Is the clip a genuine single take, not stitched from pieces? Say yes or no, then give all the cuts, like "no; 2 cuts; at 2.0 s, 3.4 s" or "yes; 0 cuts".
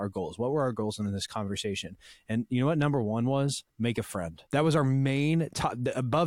no; 2 cuts; at 3.7 s, 4.5 s